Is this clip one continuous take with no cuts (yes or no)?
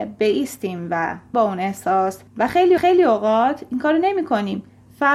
no